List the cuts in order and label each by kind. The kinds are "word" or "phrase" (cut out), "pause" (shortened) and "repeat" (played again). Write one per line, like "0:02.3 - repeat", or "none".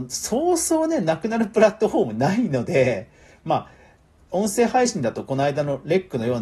0:04.2 - word